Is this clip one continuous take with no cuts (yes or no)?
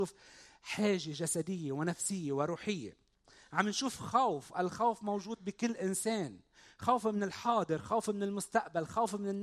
yes